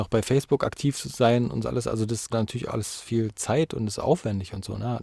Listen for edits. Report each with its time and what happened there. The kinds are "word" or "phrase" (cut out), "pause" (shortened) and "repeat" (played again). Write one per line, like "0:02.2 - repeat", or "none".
0:01.6 - word
0:02.3 - word
0:02.7 - word